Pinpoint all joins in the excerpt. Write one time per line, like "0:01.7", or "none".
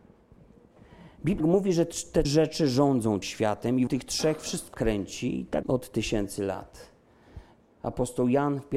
0:01.4
0:02.2
0:03.2
0:03.9
0:04.7
0:05.6